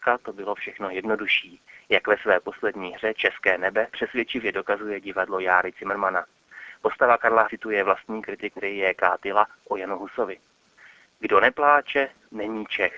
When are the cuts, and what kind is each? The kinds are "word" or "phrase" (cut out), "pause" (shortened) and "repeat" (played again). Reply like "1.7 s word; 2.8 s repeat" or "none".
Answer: 7.4 s phrase; 8.6 s word